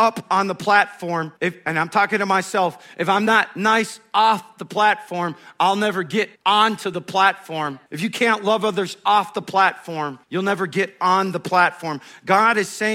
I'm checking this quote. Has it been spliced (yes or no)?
yes